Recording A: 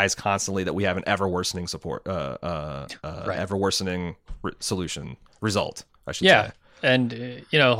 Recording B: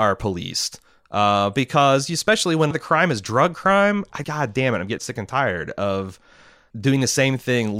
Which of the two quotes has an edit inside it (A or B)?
B